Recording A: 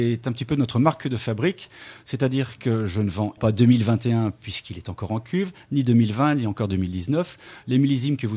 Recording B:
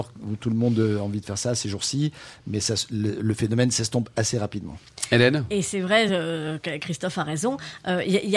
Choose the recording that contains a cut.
A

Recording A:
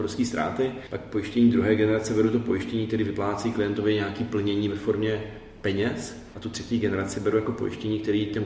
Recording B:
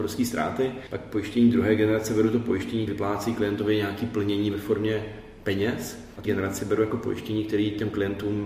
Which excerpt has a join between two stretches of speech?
B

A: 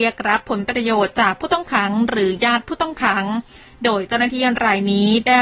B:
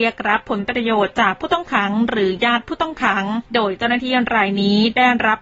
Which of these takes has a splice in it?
B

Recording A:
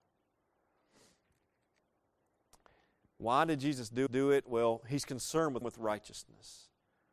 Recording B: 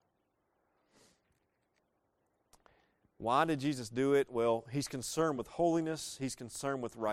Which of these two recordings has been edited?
A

